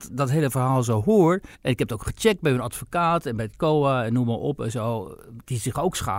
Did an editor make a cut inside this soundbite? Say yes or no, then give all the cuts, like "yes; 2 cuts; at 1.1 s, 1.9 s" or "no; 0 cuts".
yes; 1 cut; at 1.5 s